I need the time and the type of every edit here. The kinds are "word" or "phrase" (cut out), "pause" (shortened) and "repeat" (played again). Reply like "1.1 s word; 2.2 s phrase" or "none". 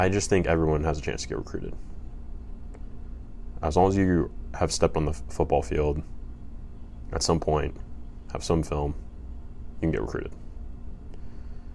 none